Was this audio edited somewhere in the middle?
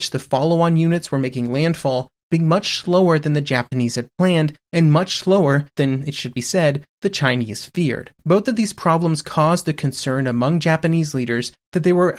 yes; 2 cuts; at 5.7 s, 8.2 s

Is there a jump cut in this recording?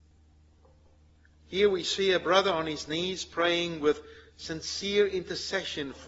no; 0 cuts

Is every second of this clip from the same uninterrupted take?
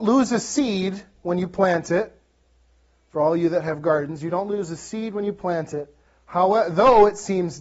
no; 1 cut; at 6.1 s

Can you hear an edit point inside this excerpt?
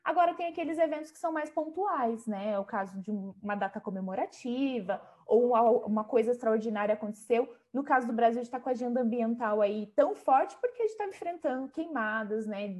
no; 0 cuts

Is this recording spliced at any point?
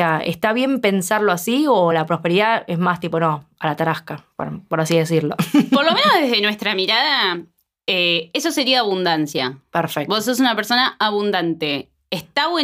no; 0 cuts

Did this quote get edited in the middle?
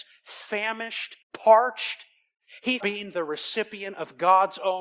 yes; 2 cuts; at 1.2 s, 2.8 s

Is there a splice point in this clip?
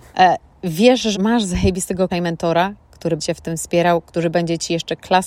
yes; 3 cuts; at 1.1 s, 2.1 s, 3.2 s

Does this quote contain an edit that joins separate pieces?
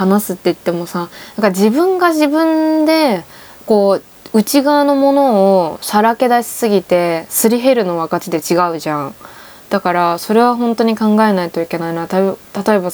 no; 0 cuts

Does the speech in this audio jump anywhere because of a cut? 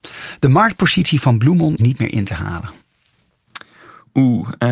yes; 1 cut; at 1.8 s

